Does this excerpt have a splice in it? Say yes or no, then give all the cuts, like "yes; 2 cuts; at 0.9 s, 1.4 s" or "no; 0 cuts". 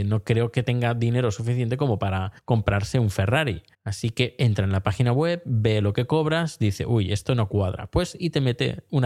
yes; 2 cuts; at 2.4 s, 3.7 s